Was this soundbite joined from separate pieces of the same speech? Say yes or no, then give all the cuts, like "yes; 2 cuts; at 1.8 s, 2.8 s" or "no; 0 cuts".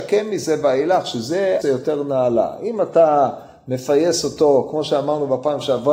yes; 1 cut; at 1.6 s